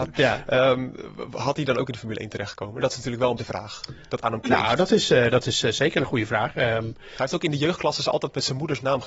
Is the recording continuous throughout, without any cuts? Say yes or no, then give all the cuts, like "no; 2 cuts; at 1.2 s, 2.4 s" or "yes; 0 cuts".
no; 1 cut; at 3.4 s